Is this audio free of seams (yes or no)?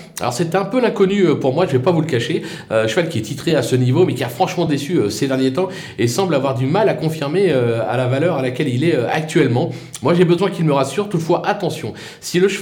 yes